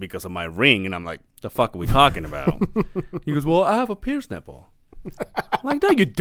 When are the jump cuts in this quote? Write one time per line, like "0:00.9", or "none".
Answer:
0:01.3